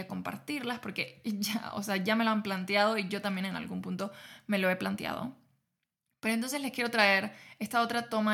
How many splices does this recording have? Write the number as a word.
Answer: zero